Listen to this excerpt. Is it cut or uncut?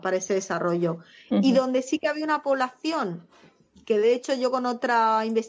uncut